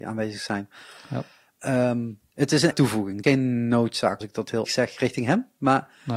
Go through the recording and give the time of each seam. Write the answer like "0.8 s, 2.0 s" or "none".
2.7 s, 3.2 s, 4.2 s, 4.7 s